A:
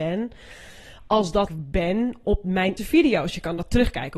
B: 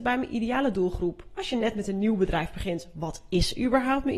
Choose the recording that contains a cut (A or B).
A